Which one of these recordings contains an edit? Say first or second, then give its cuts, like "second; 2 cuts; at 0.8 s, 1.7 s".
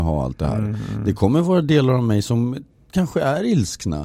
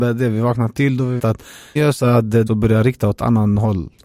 second; 3 cuts; at 1.2 s, 1.8 s, 2.5 s